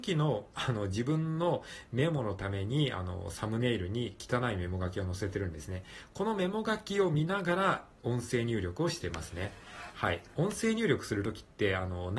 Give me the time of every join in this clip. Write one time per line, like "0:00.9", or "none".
0:10.3